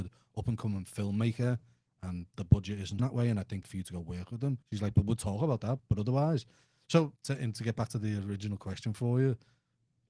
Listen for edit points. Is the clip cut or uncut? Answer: cut